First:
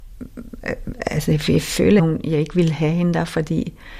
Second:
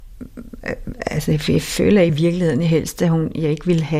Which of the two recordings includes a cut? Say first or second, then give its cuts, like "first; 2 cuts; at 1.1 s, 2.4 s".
first; 1 cut; at 2.0 s